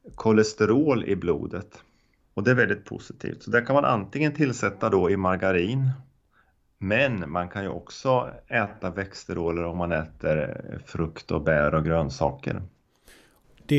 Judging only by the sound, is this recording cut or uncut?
uncut